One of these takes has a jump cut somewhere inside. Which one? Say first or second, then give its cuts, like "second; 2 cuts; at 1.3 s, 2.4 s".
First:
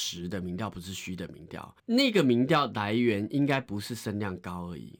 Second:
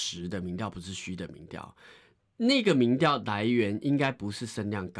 first; 1 cut; at 1.8 s